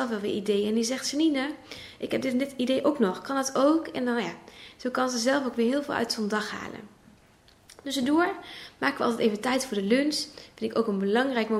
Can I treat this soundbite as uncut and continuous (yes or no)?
yes